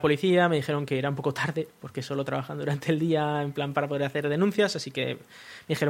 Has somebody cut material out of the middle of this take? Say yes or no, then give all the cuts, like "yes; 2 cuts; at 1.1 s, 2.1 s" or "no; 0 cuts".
no; 0 cuts